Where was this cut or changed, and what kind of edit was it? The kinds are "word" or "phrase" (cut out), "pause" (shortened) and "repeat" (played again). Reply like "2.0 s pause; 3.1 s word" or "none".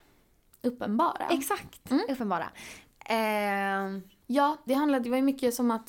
4.7 s word